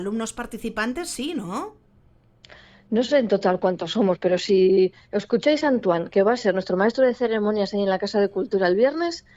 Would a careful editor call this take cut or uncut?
uncut